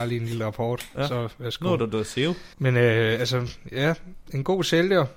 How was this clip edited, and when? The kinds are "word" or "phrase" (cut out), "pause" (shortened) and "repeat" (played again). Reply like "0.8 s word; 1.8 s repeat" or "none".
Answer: 2.5 s pause